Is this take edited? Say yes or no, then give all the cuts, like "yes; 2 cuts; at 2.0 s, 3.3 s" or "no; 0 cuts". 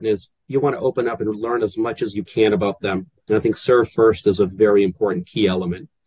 no; 0 cuts